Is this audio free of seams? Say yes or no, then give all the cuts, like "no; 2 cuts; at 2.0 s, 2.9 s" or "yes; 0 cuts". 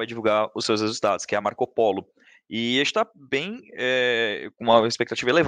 yes; 0 cuts